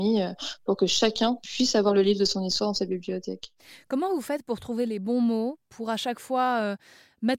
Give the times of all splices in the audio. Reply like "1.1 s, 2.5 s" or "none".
none

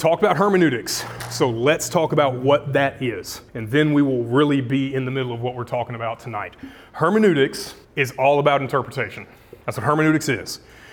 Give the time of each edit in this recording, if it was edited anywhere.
3.5 s, 7.8 s, 9.6 s

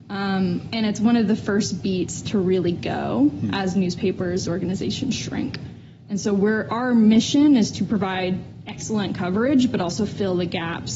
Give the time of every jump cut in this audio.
4.4 s

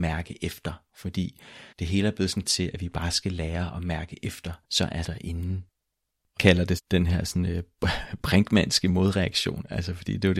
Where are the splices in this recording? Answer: 1.7 s, 2.4 s, 4.6 s, 5.0 s, 6.4 s, 6.8 s

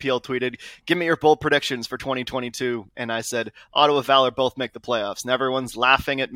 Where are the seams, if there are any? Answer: none

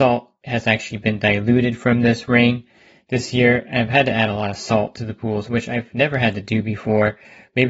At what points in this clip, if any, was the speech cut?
none

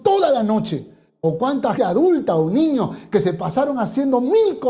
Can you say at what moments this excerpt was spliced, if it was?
1.8 s

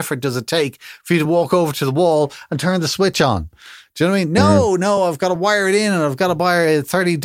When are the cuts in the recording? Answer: none

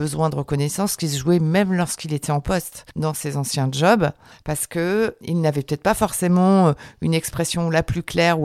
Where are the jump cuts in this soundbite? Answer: 4.3 s

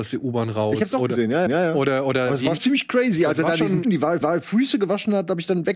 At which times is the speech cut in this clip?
1.5 s, 2.6 s, 3.8 s, 4.2 s

